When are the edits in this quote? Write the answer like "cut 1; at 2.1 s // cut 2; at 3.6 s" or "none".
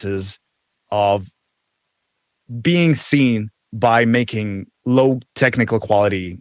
cut 1; at 4.8 s